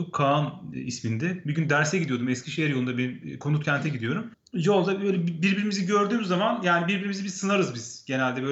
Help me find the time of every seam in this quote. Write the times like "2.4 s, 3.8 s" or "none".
none